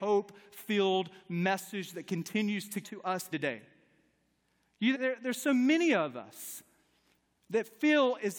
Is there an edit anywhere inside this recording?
yes; 3 cuts; at 2.8 s, 3.3 s, 4.9 s

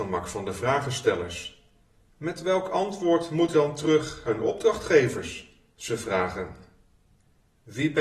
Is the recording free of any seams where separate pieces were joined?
no; 4 cuts; at 1.8 s, 3.5 s, 4.3 s, 5.7 s

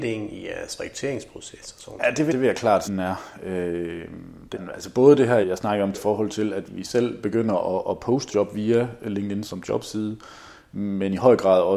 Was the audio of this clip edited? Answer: yes; 8 cuts; at 2.3 s, 2.8 s, 4.5 s, 5.4 s, 5.9 s, 6.7 s, 8.3 s, 9.4 s

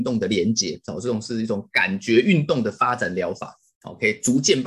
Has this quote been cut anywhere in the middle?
no; 0 cuts

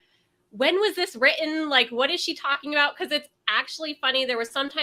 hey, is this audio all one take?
yes; 0 cuts

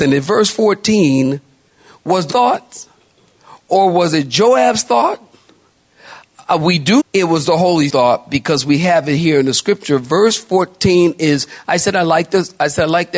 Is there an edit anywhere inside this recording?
yes; 3 cuts; at 2.3 s, 7.0 s, 7.9 s

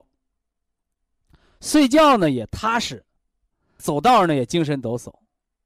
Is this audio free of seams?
no; 1 cut; at 3.8 s

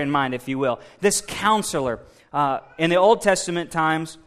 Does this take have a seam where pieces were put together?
no; 0 cuts

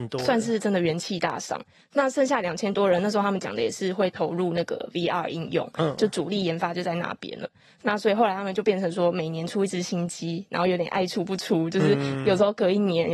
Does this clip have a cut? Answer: no; 0 cuts

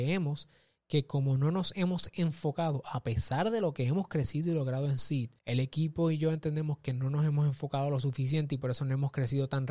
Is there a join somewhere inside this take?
yes; 1 cut; at 5.4 s

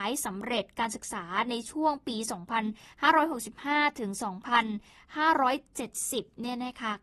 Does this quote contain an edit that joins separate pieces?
no; 0 cuts

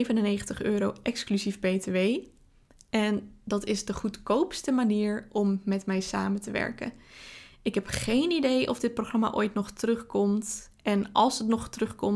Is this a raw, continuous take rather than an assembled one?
yes; 0 cuts

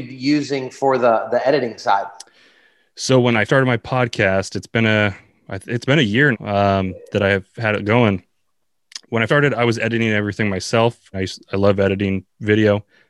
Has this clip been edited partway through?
yes; 4 cuts; at 3.5 s, 6.3 s, 9.3 s, 11.1 s

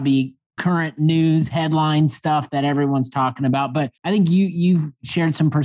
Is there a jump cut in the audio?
yes; 1 cut; at 4.0 s

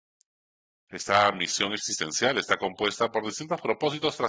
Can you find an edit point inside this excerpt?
no; 0 cuts

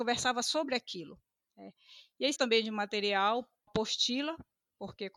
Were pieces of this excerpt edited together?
yes; 2 cuts; at 2.3 s, 3.7 s

